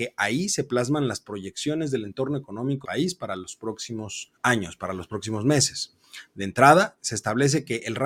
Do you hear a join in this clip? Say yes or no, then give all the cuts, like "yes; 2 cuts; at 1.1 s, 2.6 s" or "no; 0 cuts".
yes; 2 cuts; at 2.8 s, 4.4 s